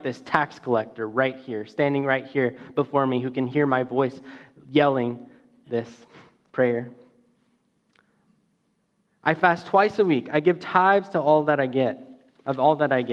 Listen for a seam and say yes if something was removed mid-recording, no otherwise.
no